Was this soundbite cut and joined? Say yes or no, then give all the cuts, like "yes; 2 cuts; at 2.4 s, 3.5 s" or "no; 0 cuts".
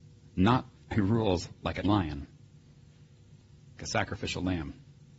yes; 3 cuts; at 0.9 s, 1.8 s, 3.8 s